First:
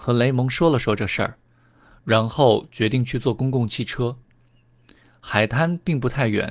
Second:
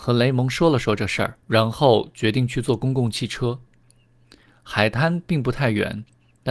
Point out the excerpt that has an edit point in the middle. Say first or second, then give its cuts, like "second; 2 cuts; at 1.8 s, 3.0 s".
second; 1 cut; at 1.4 s